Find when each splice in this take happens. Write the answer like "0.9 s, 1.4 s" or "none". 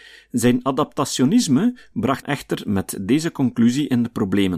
2.2 s